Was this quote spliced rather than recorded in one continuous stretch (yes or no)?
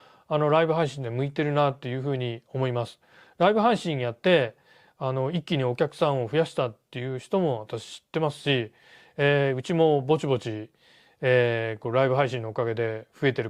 no